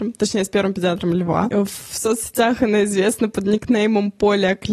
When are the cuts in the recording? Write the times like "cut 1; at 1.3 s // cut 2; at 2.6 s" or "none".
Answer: none